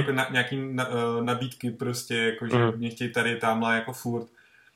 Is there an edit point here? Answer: no; 0 cuts

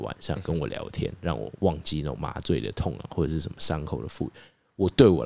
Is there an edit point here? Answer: no; 0 cuts

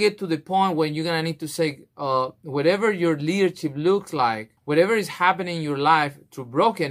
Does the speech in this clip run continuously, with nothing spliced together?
no; 1 cut; at 4.6 s

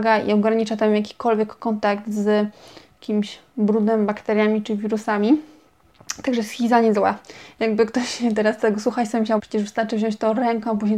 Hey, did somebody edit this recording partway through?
yes; 1 cut; at 9.4 s

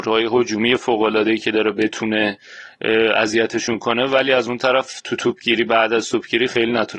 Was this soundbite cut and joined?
no; 0 cuts

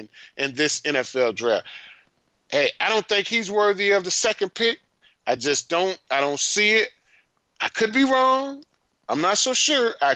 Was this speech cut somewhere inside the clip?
no; 0 cuts

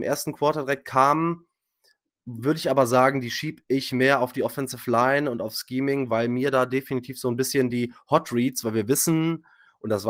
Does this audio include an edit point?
no; 0 cuts

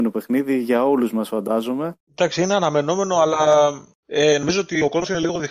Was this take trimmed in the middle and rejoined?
no; 0 cuts

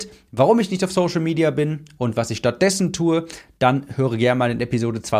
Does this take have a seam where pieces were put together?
no; 0 cuts

